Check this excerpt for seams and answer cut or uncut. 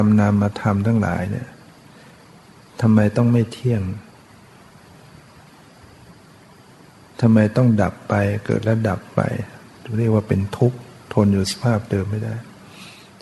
uncut